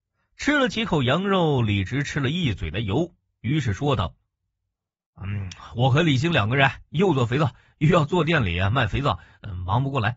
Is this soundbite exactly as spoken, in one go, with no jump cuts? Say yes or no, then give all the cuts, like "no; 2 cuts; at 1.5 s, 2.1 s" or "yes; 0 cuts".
yes; 0 cuts